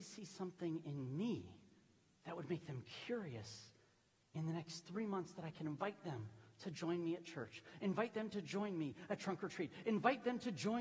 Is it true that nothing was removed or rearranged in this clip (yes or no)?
yes